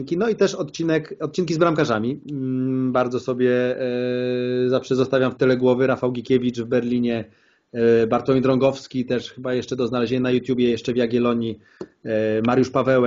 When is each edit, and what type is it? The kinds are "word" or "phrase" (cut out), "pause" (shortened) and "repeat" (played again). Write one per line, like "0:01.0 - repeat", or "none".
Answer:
none